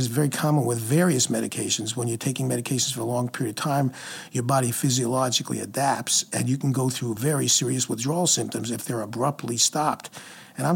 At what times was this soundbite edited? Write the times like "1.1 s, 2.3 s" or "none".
none